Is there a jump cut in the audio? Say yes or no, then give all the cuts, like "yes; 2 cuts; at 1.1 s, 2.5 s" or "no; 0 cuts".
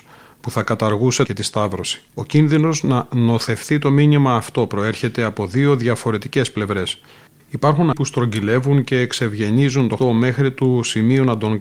yes; 4 cuts; at 1.2 s, 2.1 s, 7.9 s, 10.0 s